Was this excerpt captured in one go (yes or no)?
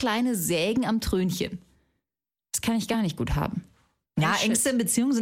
yes